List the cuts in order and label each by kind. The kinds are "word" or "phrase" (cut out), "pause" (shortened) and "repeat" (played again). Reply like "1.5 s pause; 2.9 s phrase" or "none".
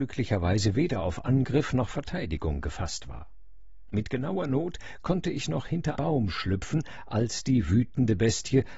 6.0 s word